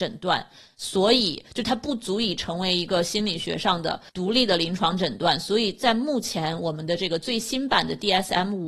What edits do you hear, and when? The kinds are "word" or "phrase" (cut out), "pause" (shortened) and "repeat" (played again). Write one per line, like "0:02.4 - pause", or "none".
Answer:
0:04.1 - pause